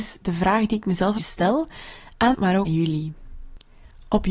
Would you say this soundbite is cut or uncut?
cut